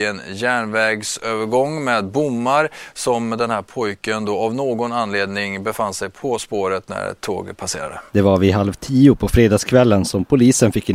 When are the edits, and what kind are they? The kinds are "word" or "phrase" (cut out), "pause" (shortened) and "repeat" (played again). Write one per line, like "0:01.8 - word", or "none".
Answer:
0:08.1 - pause